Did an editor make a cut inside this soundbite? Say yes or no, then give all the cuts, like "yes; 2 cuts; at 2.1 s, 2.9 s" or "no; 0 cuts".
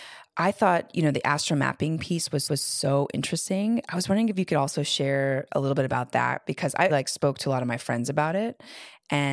yes; 2 cuts; at 2.5 s, 6.9 s